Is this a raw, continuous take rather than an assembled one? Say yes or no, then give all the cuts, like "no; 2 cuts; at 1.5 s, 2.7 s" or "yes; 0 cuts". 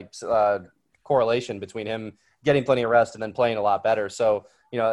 yes; 0 cuts